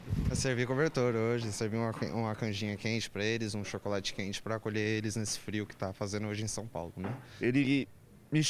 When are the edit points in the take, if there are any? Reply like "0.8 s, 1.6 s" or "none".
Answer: none